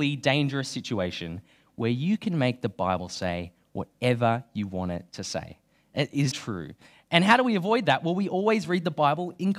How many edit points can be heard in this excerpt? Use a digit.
1